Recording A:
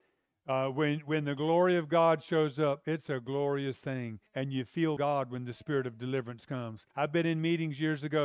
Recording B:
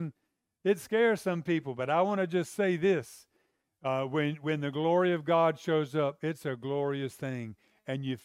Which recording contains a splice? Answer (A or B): A